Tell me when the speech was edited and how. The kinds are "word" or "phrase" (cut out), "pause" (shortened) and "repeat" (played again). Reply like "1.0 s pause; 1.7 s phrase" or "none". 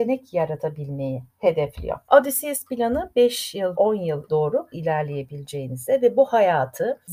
3.8 s word; 4.3 s word; 4.7 s word